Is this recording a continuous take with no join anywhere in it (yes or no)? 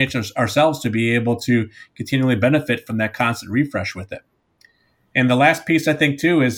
yes